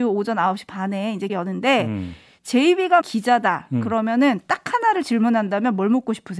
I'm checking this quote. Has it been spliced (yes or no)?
yes